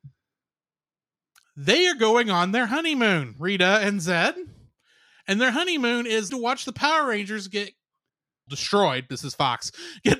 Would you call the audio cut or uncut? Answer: cut